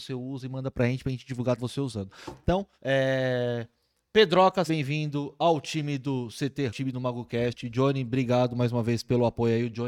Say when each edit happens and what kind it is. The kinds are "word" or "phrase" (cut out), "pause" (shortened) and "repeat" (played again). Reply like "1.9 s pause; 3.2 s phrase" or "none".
1.6 s word; 2.7 s pause; 4.7 s word; 6.7 s phrase